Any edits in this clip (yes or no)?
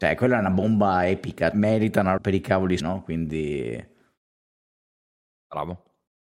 yes